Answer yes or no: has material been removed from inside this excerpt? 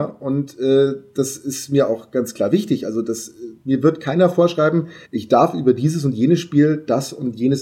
yes